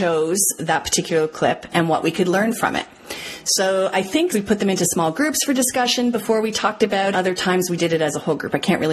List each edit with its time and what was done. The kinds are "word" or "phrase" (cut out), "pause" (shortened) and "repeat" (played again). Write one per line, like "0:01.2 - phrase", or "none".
0:04.3 - word
0:07.1 - phrase